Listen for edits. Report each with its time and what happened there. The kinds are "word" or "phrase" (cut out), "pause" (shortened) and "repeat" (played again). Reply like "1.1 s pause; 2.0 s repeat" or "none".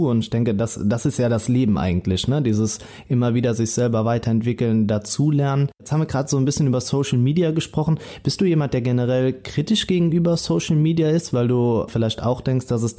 none